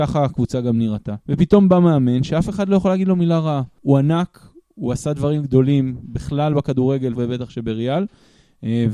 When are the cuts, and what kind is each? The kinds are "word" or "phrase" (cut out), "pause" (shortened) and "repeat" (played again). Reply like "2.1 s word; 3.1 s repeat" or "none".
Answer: 1.2 s pause; 7.1 s word